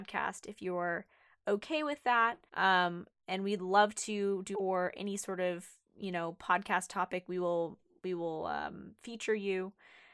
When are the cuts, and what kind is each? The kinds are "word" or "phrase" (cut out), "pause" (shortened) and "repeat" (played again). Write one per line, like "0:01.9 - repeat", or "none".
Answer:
0:02.5 - pause
0:04.5 - phrase